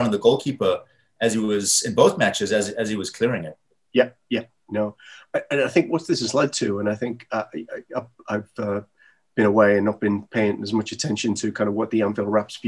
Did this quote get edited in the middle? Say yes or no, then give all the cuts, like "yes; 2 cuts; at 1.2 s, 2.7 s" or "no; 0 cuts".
no; 0 cuts